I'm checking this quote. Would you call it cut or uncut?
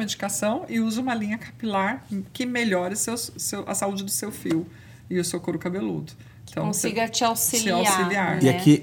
uncut